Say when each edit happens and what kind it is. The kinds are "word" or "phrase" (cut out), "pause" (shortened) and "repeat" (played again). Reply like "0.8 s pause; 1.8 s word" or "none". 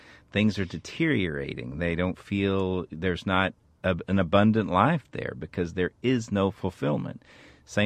none